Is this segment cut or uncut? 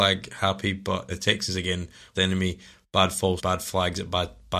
cut